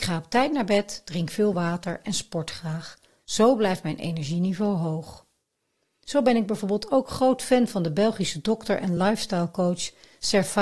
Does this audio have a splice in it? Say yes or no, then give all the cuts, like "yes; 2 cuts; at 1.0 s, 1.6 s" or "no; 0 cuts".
no; 0 cuts